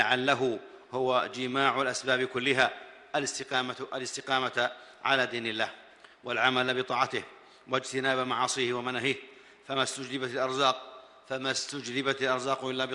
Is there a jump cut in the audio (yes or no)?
no